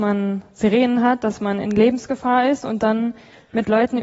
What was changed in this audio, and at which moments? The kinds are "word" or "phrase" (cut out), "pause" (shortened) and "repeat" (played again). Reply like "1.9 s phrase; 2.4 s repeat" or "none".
none